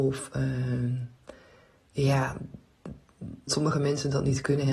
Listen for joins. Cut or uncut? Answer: cut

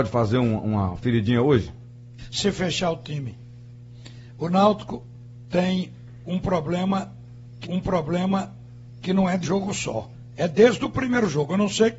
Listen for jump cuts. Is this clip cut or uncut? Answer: cut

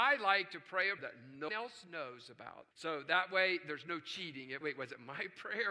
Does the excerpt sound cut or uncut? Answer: cut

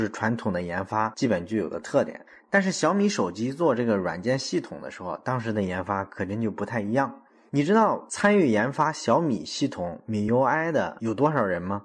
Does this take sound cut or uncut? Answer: uncut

